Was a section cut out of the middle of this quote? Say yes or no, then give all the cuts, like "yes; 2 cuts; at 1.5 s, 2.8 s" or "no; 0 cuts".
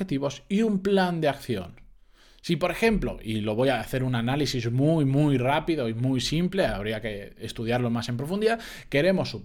no; 0 cuts